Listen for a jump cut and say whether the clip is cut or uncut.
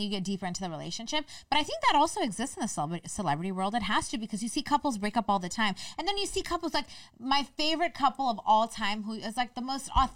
uncut